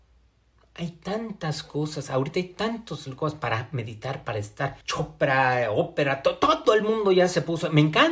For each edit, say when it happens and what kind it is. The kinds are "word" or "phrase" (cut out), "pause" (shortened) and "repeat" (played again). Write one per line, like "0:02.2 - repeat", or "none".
0:04.8 - pause